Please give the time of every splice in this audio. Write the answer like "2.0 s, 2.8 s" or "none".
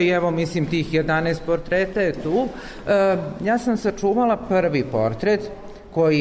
none